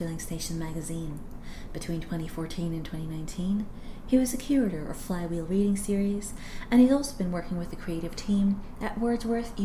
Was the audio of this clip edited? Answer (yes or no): no